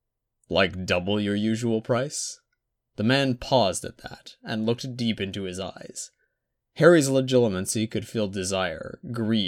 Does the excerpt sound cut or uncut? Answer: uncut